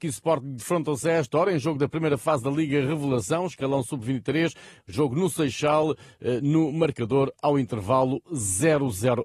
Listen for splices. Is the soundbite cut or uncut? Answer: uncut